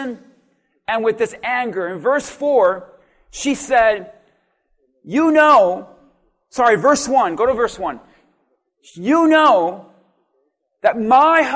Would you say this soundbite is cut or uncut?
uncut